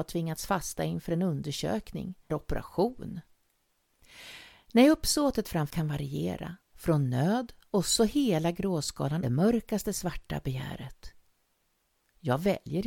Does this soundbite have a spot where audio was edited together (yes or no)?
yes